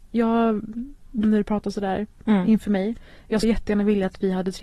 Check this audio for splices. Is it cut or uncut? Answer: cut